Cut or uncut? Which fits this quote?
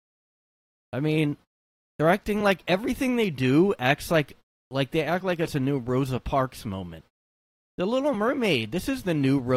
uncut